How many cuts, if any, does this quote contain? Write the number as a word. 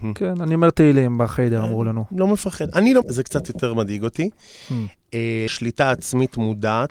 two